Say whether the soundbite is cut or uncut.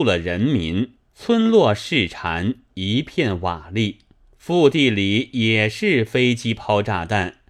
cut